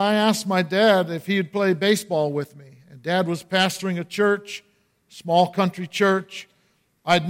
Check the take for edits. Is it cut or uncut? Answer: uncut